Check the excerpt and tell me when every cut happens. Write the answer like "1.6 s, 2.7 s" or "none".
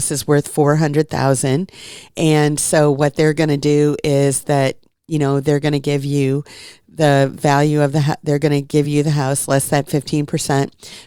none

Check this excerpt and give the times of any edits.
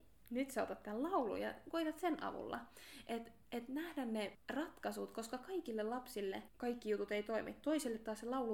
none

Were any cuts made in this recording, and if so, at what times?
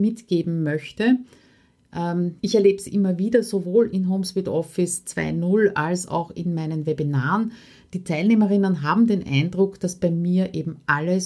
2.4 s

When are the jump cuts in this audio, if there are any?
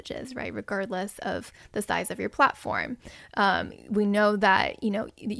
none

